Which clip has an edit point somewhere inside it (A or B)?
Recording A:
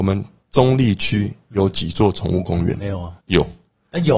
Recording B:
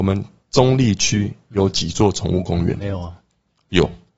A